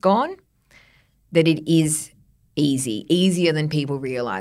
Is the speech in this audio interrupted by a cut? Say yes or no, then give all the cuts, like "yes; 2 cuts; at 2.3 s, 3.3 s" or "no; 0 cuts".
no; 0 cuts